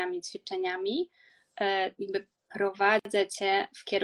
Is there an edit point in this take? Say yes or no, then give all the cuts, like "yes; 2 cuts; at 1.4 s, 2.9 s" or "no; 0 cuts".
yes; 1 cut; at 1.9 s